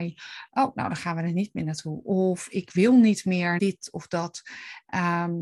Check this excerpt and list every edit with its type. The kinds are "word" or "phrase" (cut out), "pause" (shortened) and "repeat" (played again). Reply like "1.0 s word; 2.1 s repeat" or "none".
3.6 s word